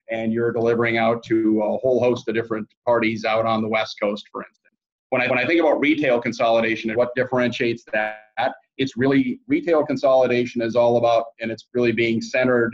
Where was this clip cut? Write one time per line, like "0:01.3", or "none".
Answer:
0:04.9
0:05.3
0:06.9